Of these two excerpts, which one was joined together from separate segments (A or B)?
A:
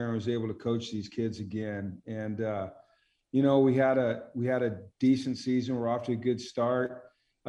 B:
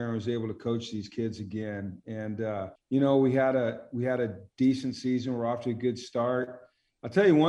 B